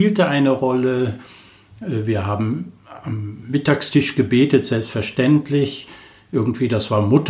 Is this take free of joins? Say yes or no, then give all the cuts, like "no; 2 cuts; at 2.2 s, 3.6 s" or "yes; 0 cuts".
yes; 0 cuts